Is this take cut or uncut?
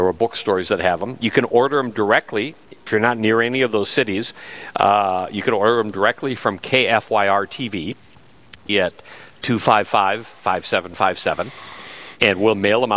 cut